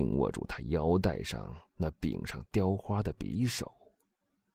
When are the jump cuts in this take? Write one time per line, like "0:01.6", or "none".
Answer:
0:01.7